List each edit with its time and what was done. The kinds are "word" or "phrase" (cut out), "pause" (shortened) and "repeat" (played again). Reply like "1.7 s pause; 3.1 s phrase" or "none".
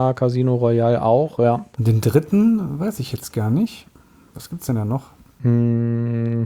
none

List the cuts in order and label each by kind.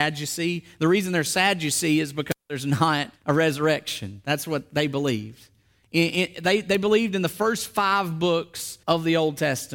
3.2 s pause; 8.8 s pause

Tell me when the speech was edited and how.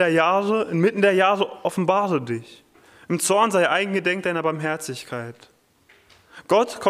none

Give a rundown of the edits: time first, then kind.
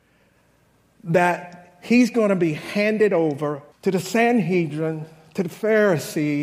3.7 s pause

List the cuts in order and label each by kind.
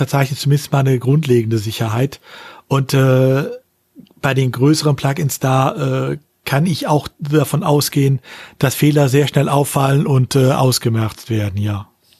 none

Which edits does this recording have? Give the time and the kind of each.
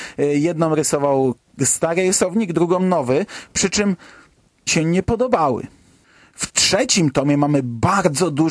4.7 s phrase

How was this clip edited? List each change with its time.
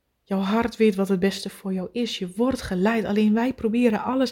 none

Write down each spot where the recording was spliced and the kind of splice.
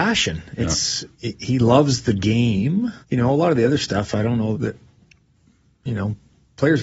1.1 s pause; 3.0 s pause; 4.5 s word

